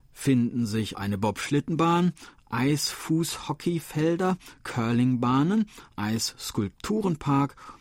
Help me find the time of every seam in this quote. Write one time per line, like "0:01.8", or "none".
0:00.9
0:05.9